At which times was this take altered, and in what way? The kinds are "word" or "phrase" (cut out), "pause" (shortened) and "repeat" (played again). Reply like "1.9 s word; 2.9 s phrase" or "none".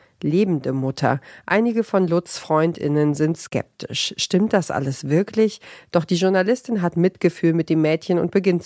none